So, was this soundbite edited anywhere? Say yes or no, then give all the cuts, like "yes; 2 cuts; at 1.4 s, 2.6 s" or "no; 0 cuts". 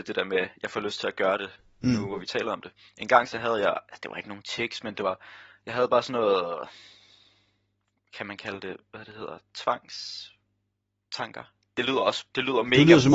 no; 0 cuts